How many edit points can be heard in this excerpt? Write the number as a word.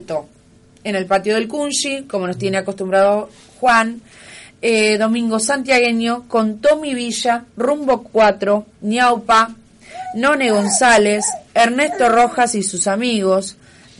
two